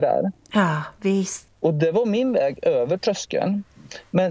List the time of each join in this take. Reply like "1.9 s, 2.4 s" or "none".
1.5 s